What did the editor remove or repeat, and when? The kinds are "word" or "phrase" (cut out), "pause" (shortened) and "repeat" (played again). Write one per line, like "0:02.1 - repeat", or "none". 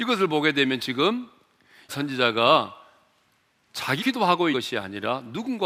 0:01.9 - word
0:04.0 - word
0:04.5 - word